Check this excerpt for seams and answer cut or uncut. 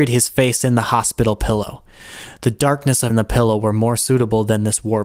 cut